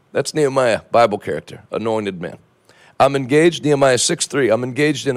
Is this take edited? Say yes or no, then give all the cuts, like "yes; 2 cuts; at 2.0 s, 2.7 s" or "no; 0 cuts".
no; 0 cuts